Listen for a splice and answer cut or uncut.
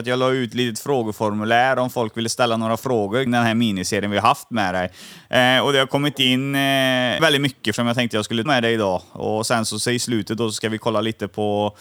cut